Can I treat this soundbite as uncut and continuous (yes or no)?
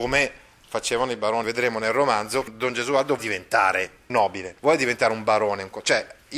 no